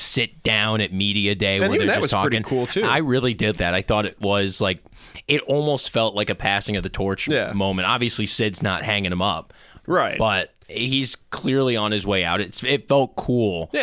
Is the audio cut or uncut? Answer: cut